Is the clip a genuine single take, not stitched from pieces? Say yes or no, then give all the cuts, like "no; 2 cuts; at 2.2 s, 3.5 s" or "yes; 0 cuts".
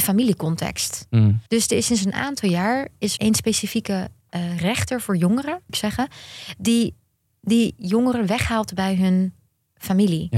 no; 4 cuts; at 1.5 s, 3.2 s, 5.7 s, 7.3 s